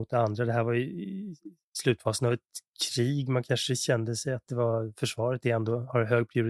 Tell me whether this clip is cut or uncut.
uncut